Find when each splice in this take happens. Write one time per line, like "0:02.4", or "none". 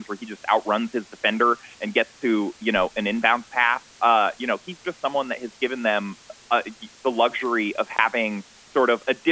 0:03.9